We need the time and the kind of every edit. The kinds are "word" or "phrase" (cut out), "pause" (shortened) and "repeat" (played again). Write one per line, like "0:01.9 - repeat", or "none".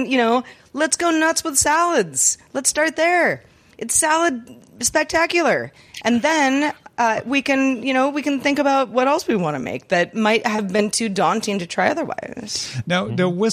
none